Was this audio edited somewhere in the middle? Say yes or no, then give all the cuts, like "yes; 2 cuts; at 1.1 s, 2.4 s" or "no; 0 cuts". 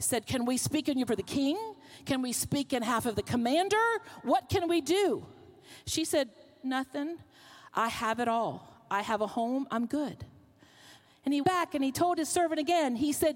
yes; 2 cuts; at 1.1 s, 11.4 s